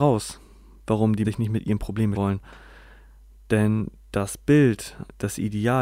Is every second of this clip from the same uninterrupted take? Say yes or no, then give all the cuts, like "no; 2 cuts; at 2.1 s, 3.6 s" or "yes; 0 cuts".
no; 2 cuts; at 1.2 s, 2.1 s